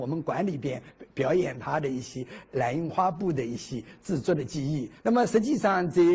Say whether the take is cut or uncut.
cut